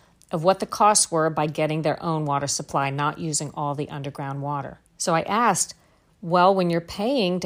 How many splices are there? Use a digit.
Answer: 1